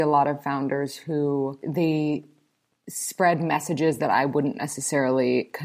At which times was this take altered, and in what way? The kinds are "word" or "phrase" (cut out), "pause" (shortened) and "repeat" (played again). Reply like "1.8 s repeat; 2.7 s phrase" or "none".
none